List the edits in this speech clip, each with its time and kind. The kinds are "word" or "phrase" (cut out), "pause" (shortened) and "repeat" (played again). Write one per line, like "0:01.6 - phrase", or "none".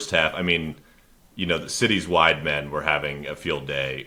none